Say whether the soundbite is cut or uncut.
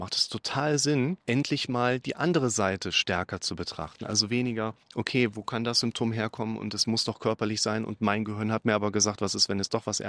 cut